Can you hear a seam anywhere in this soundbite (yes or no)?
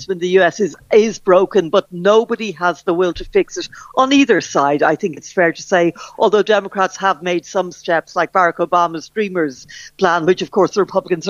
no